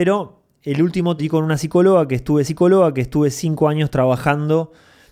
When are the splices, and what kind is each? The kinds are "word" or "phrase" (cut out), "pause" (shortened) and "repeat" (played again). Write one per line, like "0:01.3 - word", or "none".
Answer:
0:01.2 - word
0:02.4 - repeat

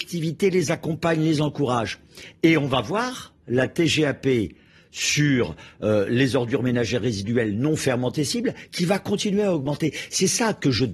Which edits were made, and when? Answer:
none

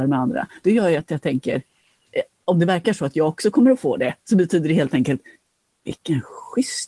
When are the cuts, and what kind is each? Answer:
none

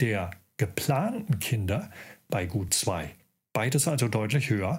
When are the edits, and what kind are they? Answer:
none

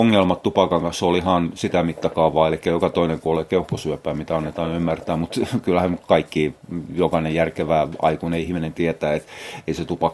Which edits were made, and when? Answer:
none

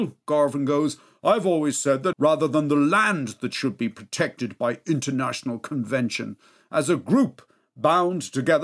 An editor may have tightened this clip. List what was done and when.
0:02.1 - phrase

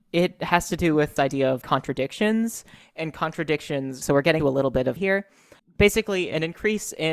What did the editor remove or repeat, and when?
0:01.2 - word
0:01.6 - word
0:04.0 - word
0:04.4 - word
0:05.0 - word
0:05.6 - word

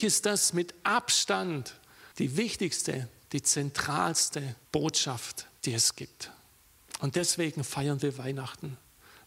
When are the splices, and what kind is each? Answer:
0:02.1 - pause
0:04.6 - pause

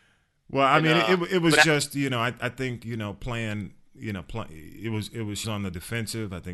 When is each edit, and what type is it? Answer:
0:05.4 - word

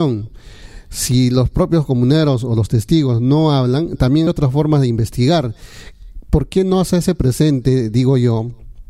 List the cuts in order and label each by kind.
0:04.3 - word

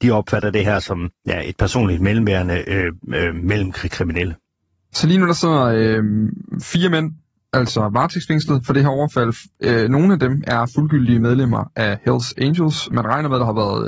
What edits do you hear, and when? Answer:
none

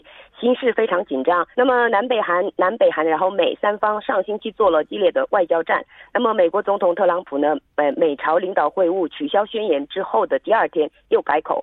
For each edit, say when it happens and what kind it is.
0:01.5 - pause
0:02.5 - pause

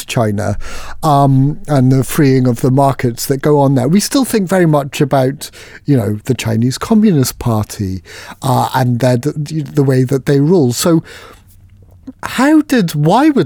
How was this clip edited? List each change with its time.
none

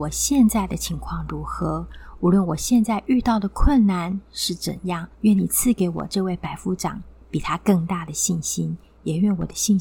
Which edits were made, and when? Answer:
0:05.1 - pause

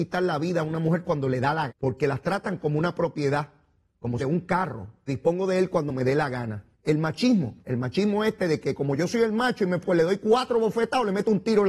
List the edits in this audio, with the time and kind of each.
0:01.7 - word
0:04.2 - phrase
0:05.1 - word
0:06.7 - pause
0:07.6 - pause
0:09.8 - word

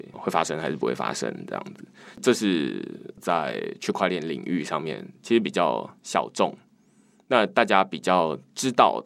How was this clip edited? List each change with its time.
none

